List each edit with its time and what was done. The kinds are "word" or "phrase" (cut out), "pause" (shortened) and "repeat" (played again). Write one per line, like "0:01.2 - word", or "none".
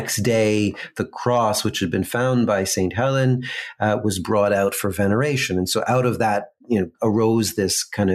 0:06.6 - pause
0:06.9 - pause